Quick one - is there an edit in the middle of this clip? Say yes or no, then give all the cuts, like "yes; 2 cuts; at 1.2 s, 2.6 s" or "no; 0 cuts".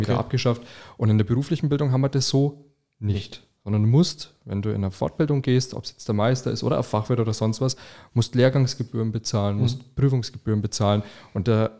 no; 0 cuts